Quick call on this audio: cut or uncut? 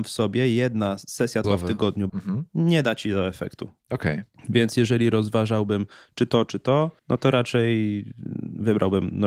cut